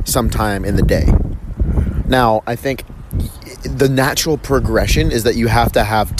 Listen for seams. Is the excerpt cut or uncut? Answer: uncut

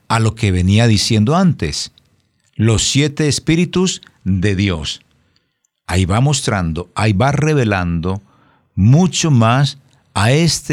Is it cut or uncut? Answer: uncut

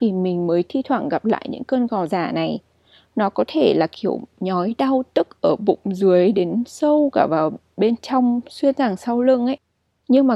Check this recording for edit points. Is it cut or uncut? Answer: uncut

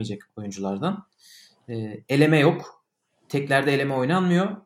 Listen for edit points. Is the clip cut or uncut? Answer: uncut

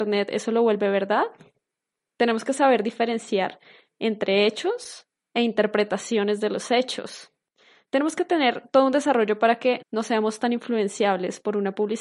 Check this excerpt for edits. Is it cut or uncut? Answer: cut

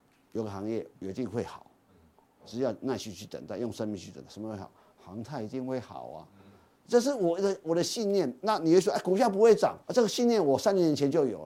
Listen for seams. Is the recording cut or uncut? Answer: cut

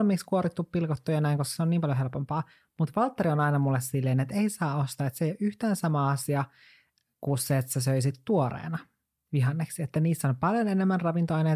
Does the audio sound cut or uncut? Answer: uncut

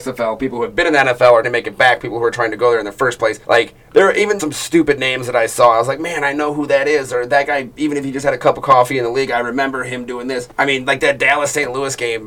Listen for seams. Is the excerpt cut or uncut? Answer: cut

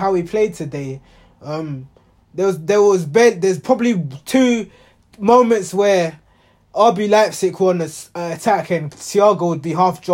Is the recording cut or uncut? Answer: uncut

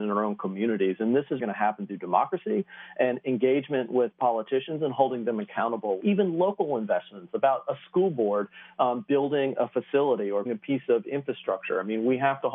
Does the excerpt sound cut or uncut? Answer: cut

